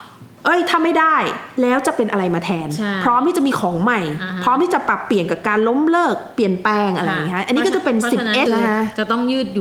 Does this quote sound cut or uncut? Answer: cut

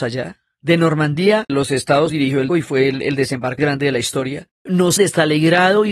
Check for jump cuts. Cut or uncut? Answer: cut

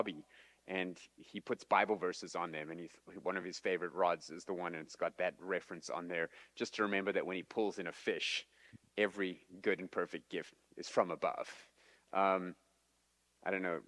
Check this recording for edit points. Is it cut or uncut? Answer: uncut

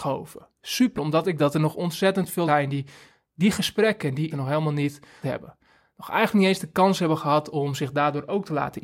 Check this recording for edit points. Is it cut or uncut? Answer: cut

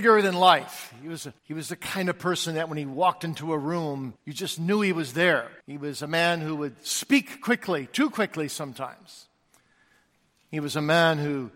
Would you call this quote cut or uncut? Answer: cut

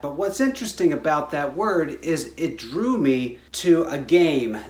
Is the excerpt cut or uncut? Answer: uncut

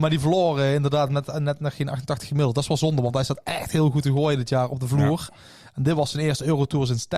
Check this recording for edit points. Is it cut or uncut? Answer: uncut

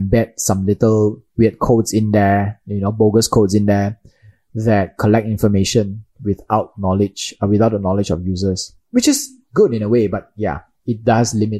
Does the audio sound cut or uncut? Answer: uncut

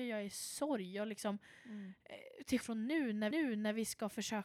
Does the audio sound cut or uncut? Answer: cut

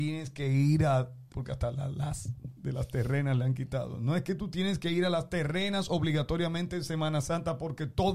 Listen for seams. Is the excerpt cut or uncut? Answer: cut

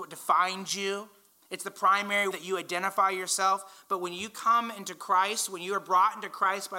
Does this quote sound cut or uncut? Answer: cut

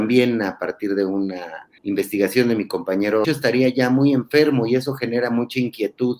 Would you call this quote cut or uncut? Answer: cut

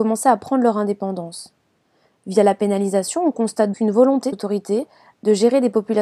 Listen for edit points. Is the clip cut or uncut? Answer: cut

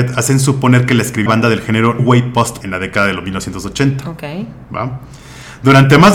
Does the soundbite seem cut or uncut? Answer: cut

